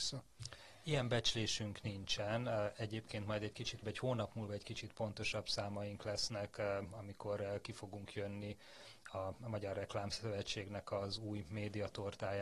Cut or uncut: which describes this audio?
cut